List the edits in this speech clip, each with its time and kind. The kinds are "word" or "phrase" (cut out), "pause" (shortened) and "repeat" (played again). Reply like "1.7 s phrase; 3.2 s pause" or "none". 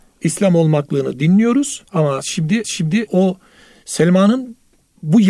1.9 s pause; 2.6 s repeat

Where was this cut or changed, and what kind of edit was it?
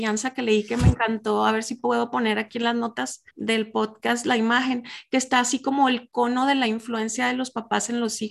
3.3 s pause

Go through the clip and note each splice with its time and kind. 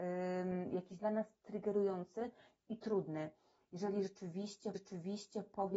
1.0 s phrase; 4.8 s repeat

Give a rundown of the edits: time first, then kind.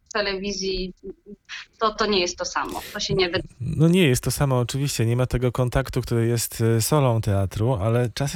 2.0 s word; 3.5 s pause

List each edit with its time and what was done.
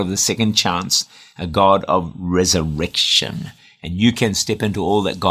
none

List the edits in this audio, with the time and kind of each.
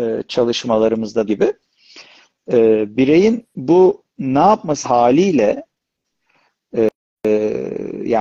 1.3 s phrase; 4.8 s phrase

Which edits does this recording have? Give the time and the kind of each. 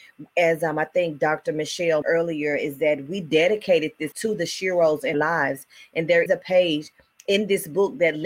2.0 s word; 4.1 s word; 5.1 s word; 6.3 s word

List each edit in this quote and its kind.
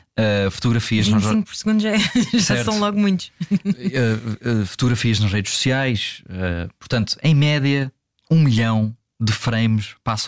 none

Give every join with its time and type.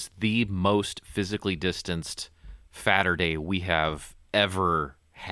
none

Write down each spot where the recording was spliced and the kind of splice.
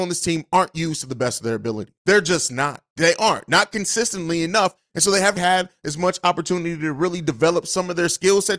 2.0 s pause; 5.4 s word

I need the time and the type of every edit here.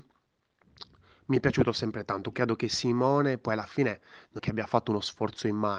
2.3 s word; 4.4 s word

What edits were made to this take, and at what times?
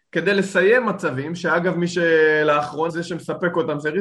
2.9 s word

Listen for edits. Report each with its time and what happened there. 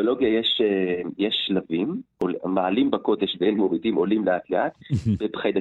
none

